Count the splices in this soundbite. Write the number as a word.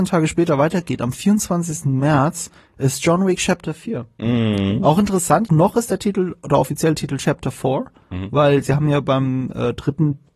one